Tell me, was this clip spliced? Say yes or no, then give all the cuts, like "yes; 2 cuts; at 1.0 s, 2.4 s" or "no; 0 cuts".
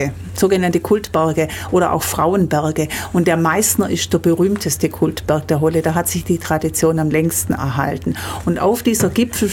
no; 0 cuts